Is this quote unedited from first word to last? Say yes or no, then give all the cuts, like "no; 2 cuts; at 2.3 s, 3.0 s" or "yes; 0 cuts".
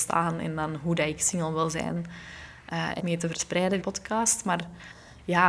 no; 2 cuts; at 3.0 s, 3.8 s